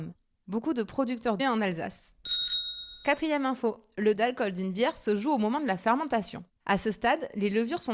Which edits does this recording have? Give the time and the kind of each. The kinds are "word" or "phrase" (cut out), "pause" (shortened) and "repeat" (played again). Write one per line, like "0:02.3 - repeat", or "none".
0:01.4 - phrase
0:04.1 - word